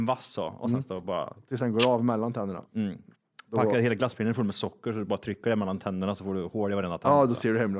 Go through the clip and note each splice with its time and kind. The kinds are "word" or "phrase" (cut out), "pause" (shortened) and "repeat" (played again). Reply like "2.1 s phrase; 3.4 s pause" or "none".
none